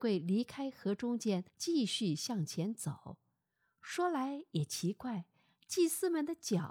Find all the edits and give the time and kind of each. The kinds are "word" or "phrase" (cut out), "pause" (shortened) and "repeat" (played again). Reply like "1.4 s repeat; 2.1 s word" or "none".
1.5 s pause